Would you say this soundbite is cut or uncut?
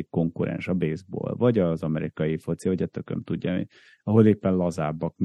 uncut